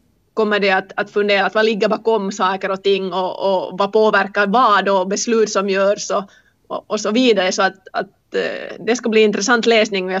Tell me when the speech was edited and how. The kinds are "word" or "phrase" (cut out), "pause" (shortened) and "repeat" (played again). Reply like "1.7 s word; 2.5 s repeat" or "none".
none